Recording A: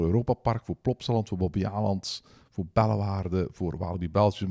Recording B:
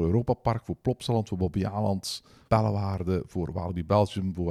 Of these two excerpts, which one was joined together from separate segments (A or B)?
B